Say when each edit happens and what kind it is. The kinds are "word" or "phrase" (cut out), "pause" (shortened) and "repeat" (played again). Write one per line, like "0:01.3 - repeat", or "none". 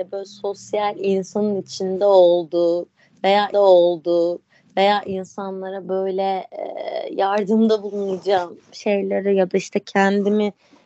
0:03.5 - repeat